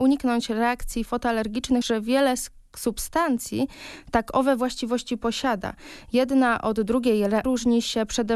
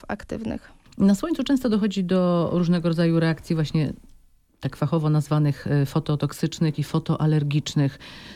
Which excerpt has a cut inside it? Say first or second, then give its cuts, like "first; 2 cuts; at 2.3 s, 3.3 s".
first; 3 cuts; at 1.1 s, 1.8 s, 7.4 s